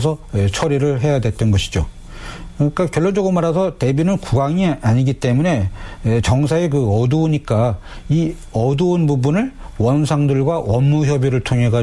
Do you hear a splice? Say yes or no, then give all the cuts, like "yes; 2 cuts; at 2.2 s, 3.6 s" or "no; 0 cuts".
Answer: no; 0 cuts